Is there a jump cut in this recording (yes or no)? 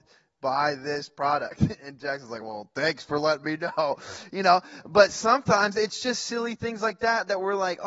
no